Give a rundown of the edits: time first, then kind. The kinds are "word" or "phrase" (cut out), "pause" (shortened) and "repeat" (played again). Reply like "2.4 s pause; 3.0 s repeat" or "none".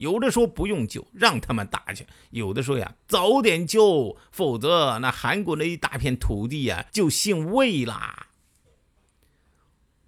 6.9 s pause